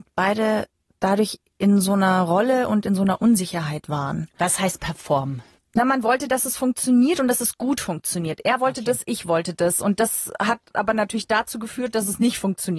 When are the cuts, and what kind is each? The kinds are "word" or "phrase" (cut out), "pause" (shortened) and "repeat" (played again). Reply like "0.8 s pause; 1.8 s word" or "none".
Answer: 5.6 s pause